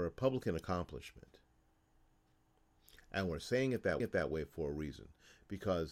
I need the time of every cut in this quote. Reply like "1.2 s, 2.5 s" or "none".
4.0 s